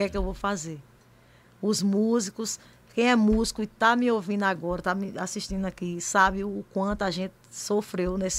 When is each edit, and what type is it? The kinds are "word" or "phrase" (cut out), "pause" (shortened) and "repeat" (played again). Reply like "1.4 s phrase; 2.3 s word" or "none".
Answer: none

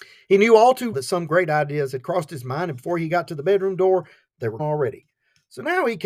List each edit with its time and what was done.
0.9 s word; 4.6 s word

